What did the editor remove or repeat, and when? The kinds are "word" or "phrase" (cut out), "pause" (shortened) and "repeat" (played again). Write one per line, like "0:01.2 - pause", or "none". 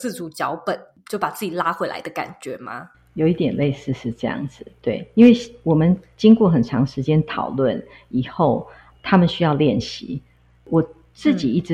none